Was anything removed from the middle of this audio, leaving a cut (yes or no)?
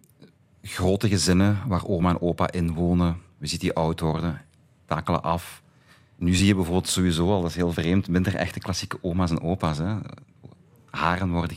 no